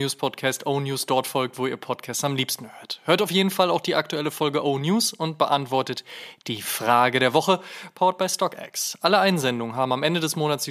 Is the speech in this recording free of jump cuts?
yes; 0 cuts

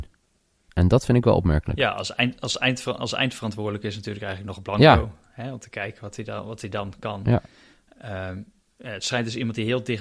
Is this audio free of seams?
yes; 0 cuts

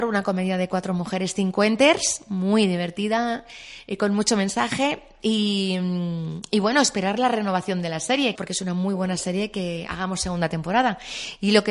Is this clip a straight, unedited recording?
no; 1 cut; at 8.4 s

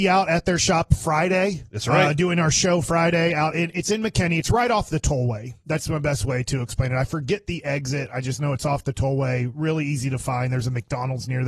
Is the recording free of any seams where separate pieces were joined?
yes; 0 cuts

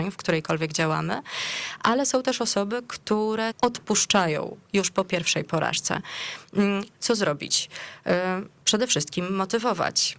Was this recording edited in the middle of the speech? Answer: yes; 1 cut; at 3.5 s

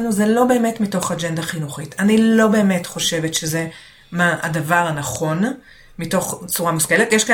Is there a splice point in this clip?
no; 0 cuts

